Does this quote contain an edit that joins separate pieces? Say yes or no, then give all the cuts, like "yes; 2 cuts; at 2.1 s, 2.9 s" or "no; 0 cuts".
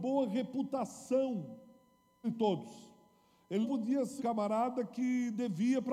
yes; 3 cuts; at 2.2 s, 3.6 s, 4.2 s